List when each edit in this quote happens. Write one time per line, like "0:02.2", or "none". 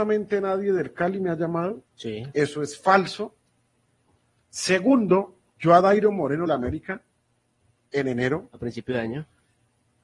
0:01.9
0:05.5
0:06.5